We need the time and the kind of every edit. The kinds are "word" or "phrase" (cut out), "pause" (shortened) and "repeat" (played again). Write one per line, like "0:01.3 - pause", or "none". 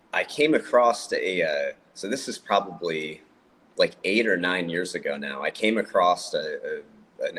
0:03.3 - pause